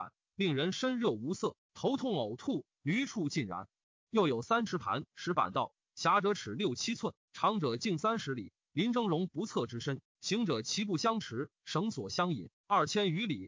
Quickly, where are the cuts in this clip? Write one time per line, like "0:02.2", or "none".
none